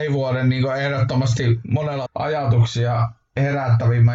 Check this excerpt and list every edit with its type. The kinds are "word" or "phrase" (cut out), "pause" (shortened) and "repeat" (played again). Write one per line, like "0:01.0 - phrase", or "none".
0:02.1 - word

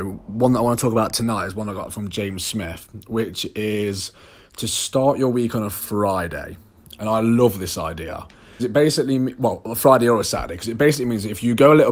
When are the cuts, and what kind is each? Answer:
0:08.6 - word

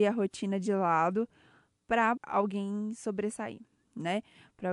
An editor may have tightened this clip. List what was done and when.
0:02.2 - word

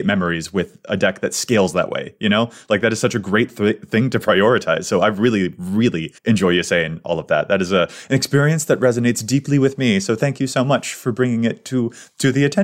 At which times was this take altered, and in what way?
0:06.2 - pause

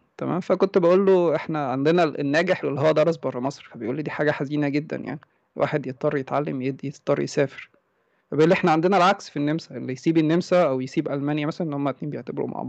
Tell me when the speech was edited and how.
0:02.6 - word

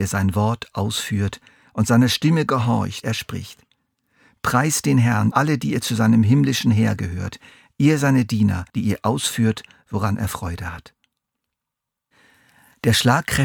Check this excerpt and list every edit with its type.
0:03.0 - word
0:05.3 - word
0:08.7 - pause

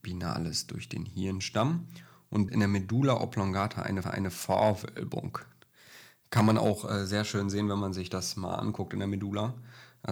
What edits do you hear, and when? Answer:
0:02.5 - word
0:04.0 - repeat

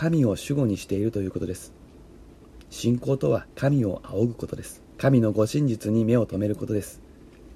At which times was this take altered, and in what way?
0:03.5 - pause
0:04.9 - pause

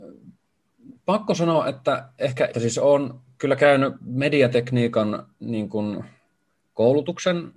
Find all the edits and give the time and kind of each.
0:01.0 - pause
0:02.5 - phrase

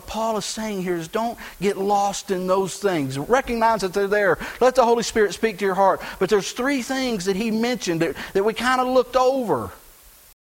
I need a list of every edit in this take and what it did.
none

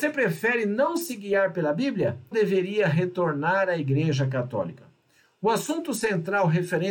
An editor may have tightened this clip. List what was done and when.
0:02.3 - word

